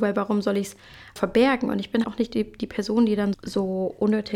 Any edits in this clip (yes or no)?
yes